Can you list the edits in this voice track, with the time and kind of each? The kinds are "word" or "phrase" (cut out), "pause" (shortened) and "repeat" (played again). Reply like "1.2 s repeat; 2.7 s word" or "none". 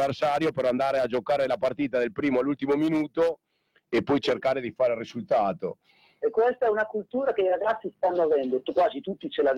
none